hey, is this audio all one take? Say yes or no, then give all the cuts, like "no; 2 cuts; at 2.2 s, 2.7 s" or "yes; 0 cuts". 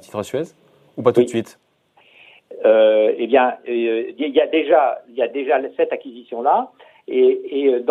yes; 0 cuts